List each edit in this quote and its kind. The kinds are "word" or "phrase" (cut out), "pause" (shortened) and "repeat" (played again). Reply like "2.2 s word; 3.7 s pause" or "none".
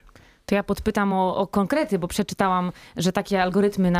none